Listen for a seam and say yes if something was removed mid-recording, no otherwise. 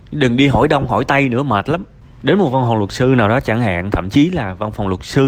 no